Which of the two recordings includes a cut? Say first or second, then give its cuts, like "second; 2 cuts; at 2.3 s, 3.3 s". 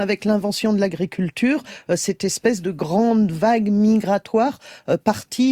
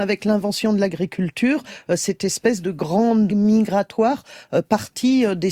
second; 1 cut; at 3.3 s